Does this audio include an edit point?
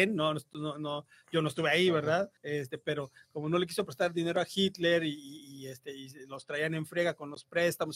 yes; 1 cut; at 2.4 s

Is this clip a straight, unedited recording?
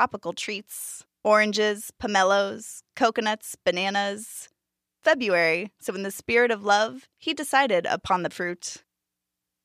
no; 3 cuts; at 1.1 s, 5.0 s, 8.3 s

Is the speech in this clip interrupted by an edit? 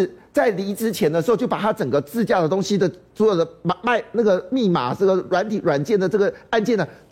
no; 0 cuts

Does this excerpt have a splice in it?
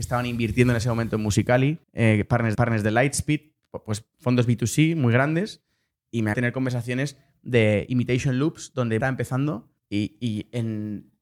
yes; 5 cuts; at 1.8 s, 2.5 s, 6.3 s, 9.0 s, 9.8 s

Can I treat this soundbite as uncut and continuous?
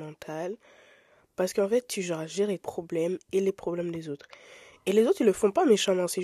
no; 1 cut; at 2.6 s

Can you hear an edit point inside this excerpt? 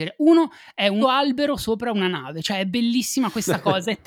yes; 1 cut; at 1.0 s

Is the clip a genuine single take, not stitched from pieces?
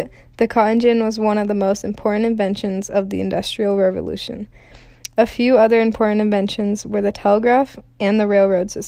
yes; 0 cuts

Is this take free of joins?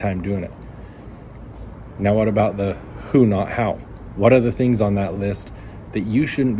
yes; 0 cuts

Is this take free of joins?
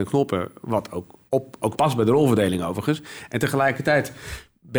no; 2 cuts; at 1.3 s, 1.7 s

